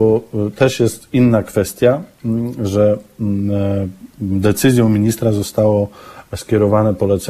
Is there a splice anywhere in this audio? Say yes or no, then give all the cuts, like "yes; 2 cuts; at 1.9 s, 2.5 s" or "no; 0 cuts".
yes; 1 cut; at 4.1 s